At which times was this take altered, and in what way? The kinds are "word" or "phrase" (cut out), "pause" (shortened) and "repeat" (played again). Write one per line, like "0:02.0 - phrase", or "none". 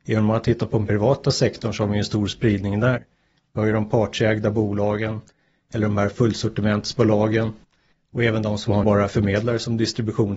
0:08.8 - word